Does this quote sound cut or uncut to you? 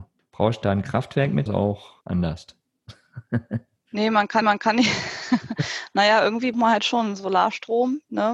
cut